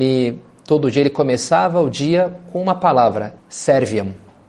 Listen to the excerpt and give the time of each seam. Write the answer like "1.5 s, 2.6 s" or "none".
3.4 s